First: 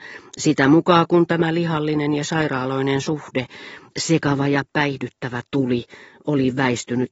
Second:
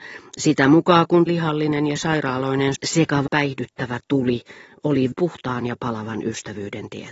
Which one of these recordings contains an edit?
second; 4 cuts; at 1.3 s, 2.8 s, 3.3 s, 5.1 s

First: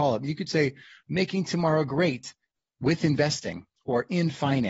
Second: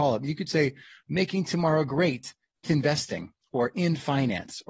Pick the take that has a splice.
second; 1 cut; at 2.6 s

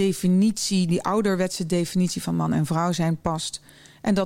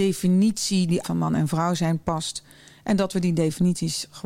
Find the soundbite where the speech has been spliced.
second; 1 cut; at 1.0 s

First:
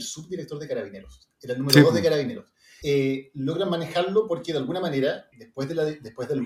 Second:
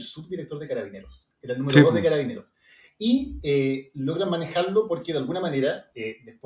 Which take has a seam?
first; 2 cuts; at 2.8 s, 5.3 s

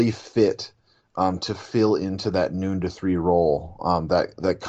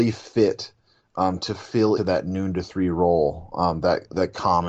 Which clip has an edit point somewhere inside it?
second; 1 cut; at 2.0 s

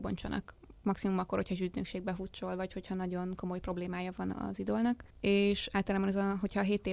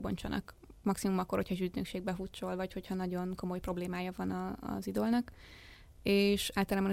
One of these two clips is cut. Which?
first; 2 cuts; at 4.3 s, 5.1 s

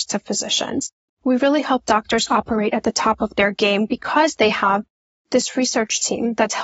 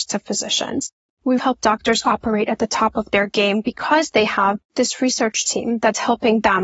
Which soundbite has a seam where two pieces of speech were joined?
second; 2 cuts; at 1.4 s, 4.6 s

